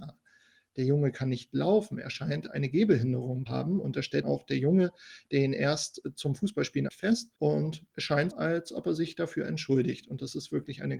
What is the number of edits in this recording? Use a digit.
5